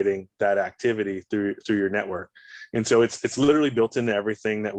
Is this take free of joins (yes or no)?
yes